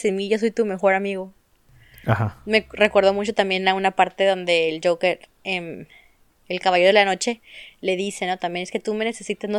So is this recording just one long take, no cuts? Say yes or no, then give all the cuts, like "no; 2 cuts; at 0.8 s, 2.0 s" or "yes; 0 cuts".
yes; 0 cuts